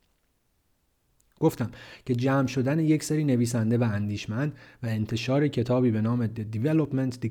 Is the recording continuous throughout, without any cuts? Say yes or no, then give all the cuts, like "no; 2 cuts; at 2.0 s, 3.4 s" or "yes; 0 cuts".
yes; 0 cuts